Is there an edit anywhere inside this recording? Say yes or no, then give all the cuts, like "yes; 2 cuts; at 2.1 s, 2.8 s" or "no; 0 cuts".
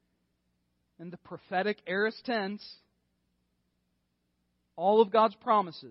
no; 0 cuts